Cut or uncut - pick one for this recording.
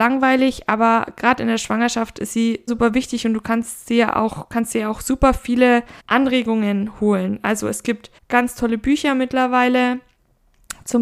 cut